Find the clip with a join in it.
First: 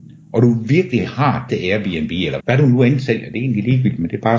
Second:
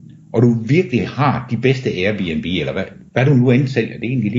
first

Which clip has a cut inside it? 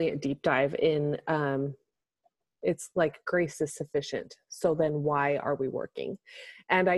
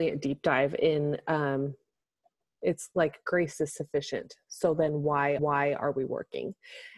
second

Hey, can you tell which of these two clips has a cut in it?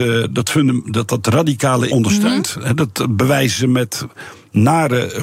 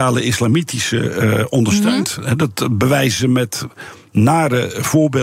first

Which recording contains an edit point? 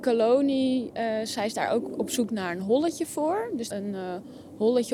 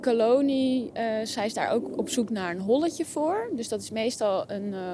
first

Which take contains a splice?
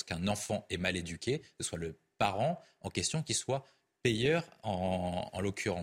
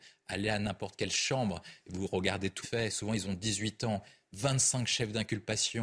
second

